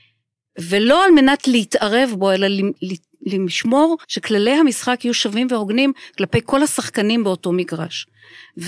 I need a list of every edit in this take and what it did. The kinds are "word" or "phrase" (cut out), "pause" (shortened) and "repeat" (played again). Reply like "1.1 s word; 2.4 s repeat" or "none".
4.0 s pause